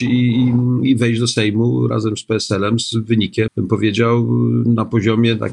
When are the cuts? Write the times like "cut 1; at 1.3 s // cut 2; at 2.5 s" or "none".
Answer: cut 1; at 3.5 s